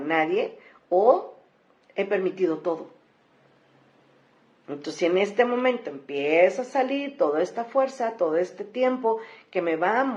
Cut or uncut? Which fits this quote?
uncut